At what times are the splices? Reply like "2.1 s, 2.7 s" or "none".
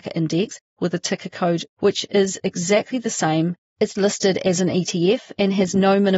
1.7 s, 4.0 s